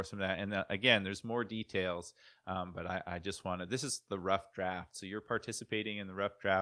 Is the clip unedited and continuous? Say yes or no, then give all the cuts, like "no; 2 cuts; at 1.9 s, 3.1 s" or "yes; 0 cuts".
yes; 0 cuts